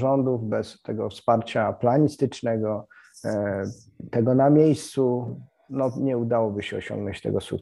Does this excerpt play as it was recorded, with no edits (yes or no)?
yes